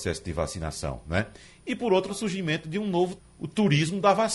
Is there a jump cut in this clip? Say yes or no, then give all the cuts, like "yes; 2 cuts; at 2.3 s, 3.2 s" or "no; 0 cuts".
yes; 2 cuts; at 2.1 s, 3.2 s